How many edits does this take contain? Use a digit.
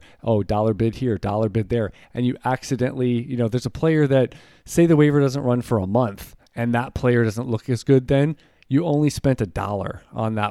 0